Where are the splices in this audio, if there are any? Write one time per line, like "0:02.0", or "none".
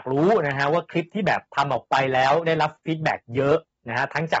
0:01.5